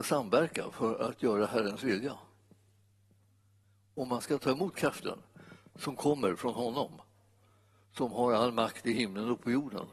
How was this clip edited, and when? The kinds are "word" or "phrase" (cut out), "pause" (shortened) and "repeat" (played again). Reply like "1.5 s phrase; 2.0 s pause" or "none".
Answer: none